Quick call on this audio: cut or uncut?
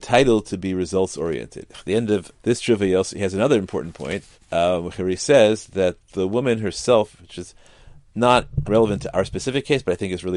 cut